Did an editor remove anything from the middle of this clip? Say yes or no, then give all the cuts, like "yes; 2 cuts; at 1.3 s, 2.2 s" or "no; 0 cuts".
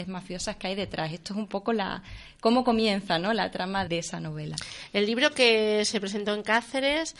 yes; 1 cut; at 3.9 s